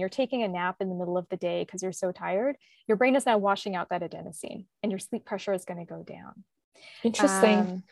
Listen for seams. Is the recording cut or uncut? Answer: uncut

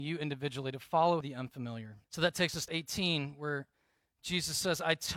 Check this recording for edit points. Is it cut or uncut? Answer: cut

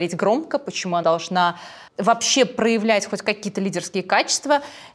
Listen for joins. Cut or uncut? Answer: cut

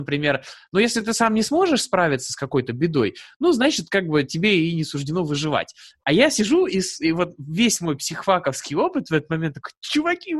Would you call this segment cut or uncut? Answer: uncut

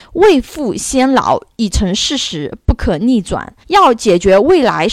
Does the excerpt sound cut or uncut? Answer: cut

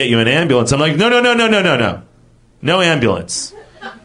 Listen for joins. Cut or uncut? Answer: uncut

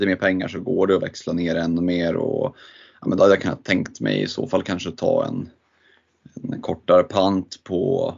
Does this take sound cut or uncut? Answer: uncut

